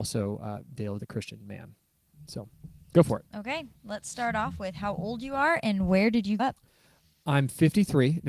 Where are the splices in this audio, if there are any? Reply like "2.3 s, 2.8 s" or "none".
1.0 s, 3.3 s, 6.4 s